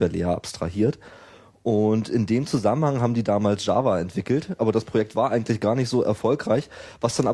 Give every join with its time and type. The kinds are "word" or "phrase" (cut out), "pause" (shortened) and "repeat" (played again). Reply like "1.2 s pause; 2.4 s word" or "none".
none